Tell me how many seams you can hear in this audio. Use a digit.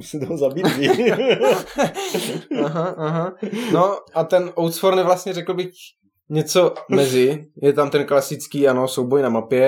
0